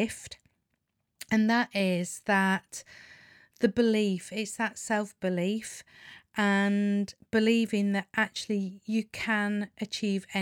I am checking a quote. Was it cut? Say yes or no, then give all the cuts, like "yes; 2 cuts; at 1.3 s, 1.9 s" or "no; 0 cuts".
no; 0 cuts